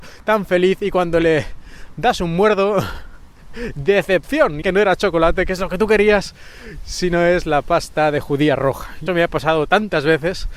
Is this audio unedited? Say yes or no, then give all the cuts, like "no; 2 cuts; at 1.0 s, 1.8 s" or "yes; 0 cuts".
no; 2 cuts; at 4.6 s, 9.1 s